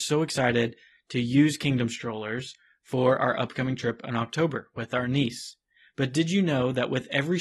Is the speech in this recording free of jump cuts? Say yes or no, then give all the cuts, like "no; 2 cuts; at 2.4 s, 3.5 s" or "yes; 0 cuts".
yes; 0 cuts